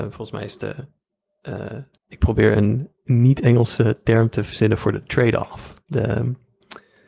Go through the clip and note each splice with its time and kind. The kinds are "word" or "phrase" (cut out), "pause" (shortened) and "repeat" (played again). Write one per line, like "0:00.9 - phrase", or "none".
0:02.0 - pause
0:03.0 - pause